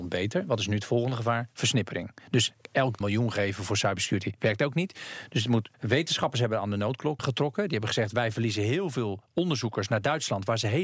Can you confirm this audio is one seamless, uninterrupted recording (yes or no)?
no